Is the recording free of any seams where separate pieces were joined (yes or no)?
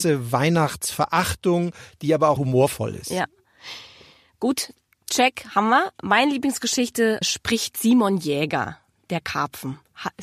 no